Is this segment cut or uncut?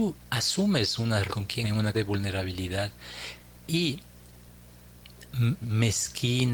cut